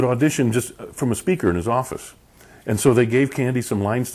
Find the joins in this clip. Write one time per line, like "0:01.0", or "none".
none